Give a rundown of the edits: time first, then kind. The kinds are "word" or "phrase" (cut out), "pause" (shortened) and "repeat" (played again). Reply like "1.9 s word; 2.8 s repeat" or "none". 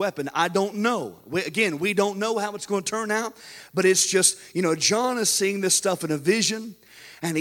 none